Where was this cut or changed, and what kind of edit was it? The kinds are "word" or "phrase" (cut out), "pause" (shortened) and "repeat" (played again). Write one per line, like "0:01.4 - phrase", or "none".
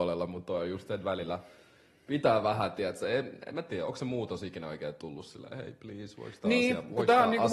none